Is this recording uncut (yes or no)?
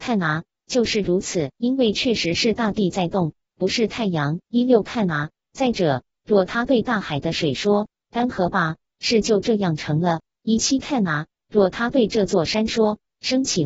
no